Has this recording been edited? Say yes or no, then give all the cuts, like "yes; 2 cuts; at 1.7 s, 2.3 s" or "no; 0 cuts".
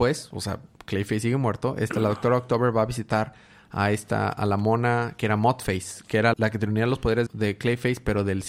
yes; 2 cuts; at 6.3 s, 7.3 s